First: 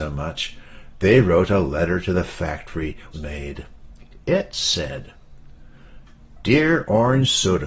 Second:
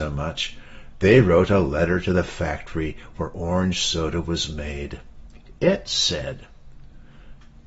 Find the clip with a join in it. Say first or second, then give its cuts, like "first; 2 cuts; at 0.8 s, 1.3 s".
first; 1 cut; at 3.1 s